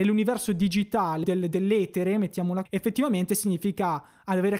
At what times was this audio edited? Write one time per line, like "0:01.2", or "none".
0:01.2
0:02.7

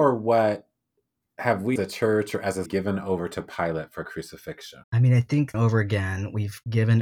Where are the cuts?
0:01.8
0:02.7
0:04.8
0:05.5

